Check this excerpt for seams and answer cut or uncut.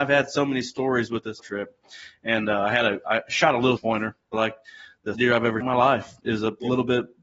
cut